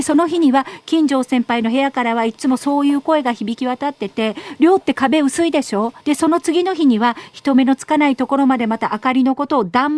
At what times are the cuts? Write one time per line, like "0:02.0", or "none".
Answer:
0:06.0